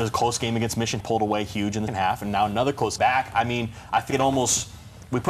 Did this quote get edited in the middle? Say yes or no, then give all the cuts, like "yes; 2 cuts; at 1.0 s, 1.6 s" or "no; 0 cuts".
yes; 4 cuts; at 1.0 s, 1.9 s, 3.0 s, 4.1 s